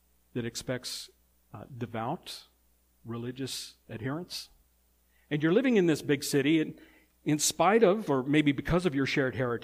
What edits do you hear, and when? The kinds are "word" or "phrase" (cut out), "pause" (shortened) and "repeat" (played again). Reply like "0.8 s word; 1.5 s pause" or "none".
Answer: 4.6 s pause

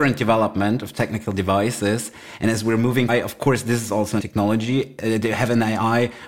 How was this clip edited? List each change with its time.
3.1 s phrase; 4.2 s word

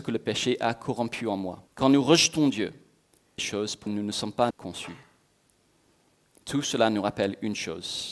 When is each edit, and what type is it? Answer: 1.7 s pause; 3.4 s phrase; 3.9 s word; 4.5 s word

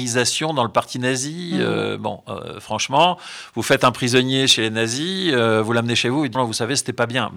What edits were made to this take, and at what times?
6.3 s word

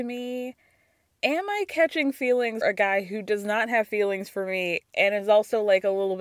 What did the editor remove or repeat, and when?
2.6 s word

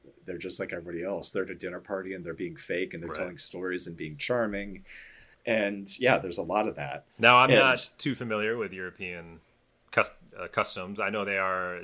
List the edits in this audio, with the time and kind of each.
5.3 s pause; 7.1 s pause

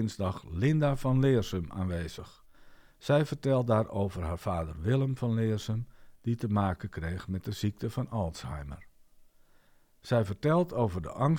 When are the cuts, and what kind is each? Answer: none

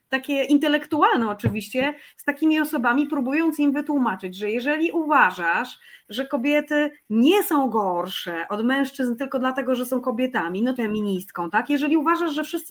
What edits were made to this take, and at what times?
10.8 s phrase

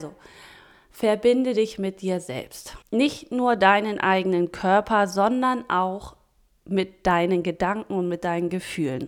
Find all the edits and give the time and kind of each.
2.8 s pause

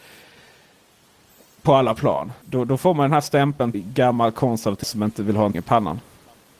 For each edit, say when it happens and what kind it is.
2.4 s pause; 3.7 s word; 4.8 s word; 5.5 s word

